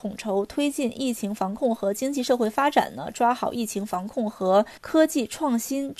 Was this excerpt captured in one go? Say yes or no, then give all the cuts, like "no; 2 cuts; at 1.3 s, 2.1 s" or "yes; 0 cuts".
no; 1 cut; at 4.8 s